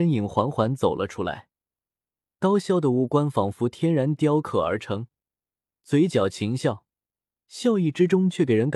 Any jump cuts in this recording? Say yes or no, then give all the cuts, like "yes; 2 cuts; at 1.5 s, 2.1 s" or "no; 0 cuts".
no; 0 cuts